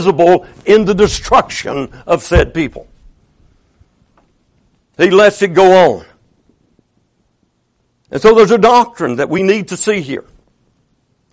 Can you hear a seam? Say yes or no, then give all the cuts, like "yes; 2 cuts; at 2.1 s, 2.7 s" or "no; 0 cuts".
no; 0 cuts